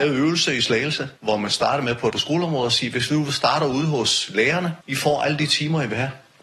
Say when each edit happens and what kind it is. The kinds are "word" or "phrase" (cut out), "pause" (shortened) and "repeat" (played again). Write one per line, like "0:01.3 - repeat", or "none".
0:01.2 - pause
0:02.1 - word
0:04.8 - pause